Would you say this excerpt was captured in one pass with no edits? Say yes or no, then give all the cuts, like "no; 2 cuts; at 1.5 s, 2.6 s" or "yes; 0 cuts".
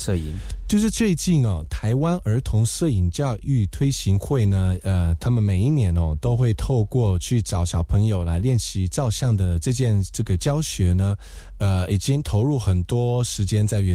yes; 0 cuts